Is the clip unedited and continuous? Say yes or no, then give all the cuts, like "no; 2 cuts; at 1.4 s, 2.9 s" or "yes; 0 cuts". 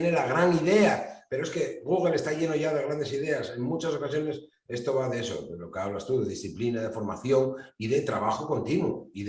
yes; 0 cuts